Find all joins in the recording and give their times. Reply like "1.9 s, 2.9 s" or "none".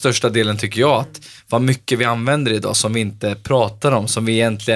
none